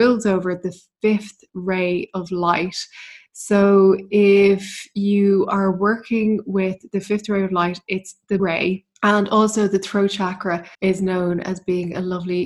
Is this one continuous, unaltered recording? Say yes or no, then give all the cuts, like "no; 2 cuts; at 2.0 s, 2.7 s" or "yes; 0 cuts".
no; 3 cuts; at 8.4 s, 9.0 s, 10.7 s